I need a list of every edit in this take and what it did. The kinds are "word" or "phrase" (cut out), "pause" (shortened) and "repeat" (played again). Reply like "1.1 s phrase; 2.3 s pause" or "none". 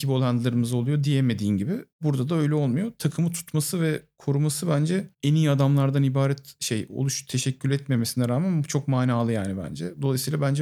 1.9 s pause; 5.1 s pause